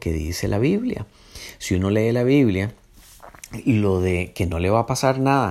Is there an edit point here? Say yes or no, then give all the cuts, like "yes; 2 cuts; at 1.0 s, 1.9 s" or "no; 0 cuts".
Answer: no; 0 cuts